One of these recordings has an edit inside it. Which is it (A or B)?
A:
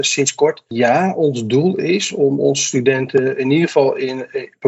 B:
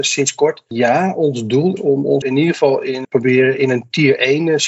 B